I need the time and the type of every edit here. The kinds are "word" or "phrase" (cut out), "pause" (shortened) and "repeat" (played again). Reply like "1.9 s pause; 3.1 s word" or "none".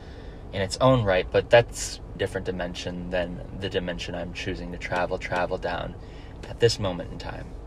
2.1 s phrase; 5.2 s repeat